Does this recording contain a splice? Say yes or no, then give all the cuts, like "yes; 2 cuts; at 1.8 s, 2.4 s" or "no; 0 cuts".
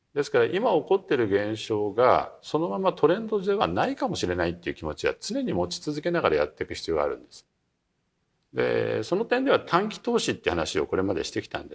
no; 0 cuts